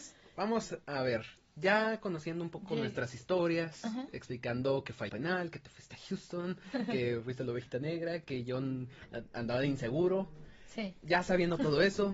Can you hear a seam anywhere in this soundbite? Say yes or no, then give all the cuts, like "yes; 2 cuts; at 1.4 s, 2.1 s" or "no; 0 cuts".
yes; 1 cut; at 5.1 s